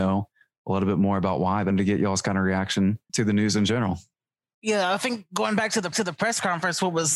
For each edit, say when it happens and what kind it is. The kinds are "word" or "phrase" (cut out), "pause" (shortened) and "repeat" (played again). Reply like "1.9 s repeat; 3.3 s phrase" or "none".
1.7 s phrase; 3.1 s word; 4.1 s pause; 5.9 s repeat